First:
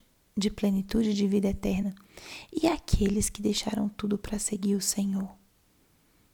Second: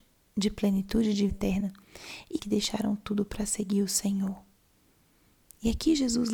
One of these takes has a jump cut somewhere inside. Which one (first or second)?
second